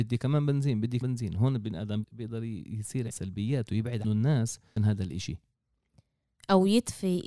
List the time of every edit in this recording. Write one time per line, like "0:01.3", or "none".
0:01.0
0:02.0
0:03.1
0:04.0
0:04.8